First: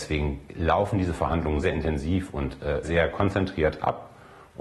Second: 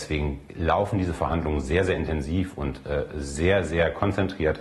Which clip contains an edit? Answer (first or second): first